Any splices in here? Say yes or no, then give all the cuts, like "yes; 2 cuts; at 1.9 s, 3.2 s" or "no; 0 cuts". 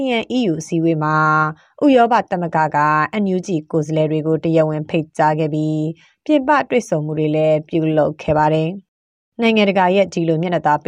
no; 0 cuts